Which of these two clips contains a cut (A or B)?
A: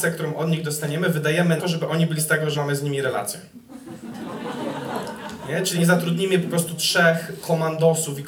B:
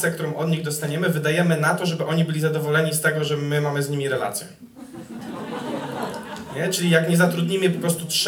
A